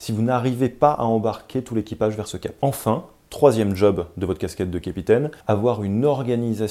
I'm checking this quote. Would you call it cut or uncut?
cut